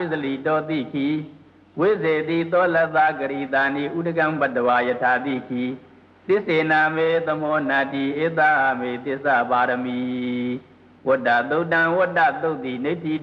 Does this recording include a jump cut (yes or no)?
no